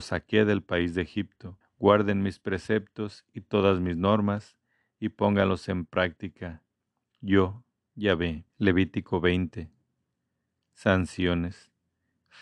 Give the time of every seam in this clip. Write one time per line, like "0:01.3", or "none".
0:01.6
0:08.5